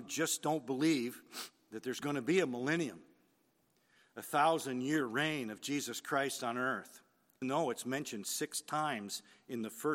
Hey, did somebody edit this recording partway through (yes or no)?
yes